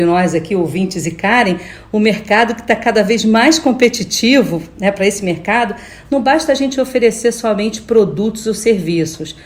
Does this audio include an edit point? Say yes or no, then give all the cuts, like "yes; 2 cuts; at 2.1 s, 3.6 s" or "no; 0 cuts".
no; 0 cuts